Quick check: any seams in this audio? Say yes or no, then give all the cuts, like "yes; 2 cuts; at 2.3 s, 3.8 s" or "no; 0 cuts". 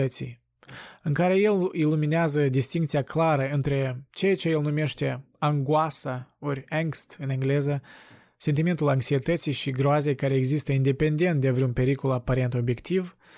no; 0 cuts